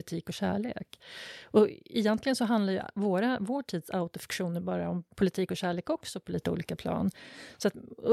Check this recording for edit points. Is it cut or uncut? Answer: uncut